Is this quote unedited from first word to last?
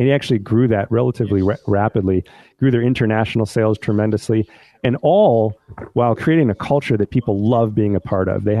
yes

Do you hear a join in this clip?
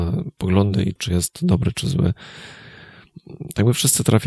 yes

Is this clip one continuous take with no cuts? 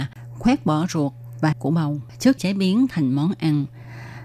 no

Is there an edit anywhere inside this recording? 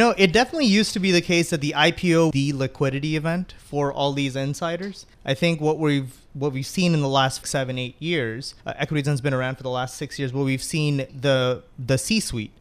yes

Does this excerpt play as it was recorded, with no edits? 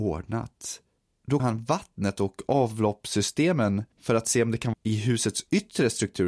no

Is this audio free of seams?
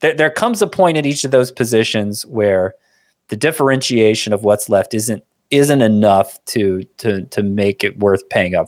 yes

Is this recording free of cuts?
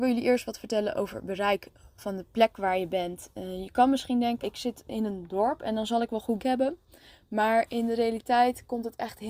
no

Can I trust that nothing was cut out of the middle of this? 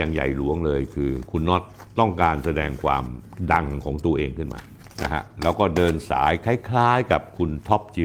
yes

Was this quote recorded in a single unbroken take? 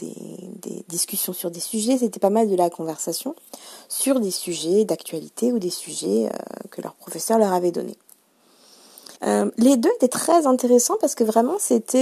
no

